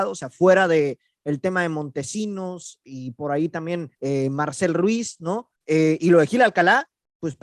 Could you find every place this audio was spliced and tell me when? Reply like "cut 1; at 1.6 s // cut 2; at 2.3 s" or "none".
cut 1; at 3.9 s // cut 2; at 5.6 s